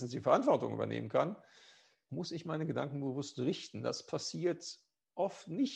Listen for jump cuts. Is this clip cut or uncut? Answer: cut